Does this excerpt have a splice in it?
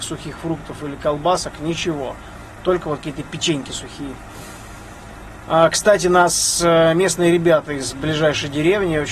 no; 0 cuts

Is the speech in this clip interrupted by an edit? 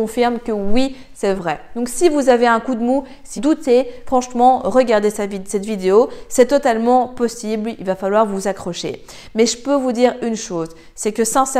yes; 2 cuts; at 1.3 s, 3.4 s

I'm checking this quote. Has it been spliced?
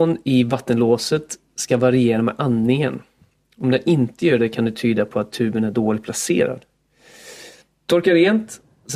no; 0 cuts

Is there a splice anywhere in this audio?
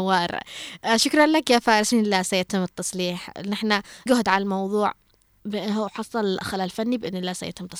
yes; 2 cuts; at 1.9 s, 4.1 s

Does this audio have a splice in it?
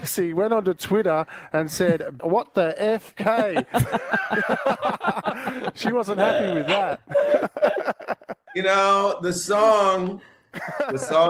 no; 0 cuts

